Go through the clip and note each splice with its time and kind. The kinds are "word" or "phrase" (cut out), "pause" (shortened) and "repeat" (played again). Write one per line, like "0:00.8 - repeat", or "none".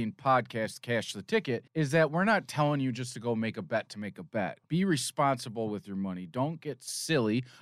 0:01.7 - pause
0:04.6 - pause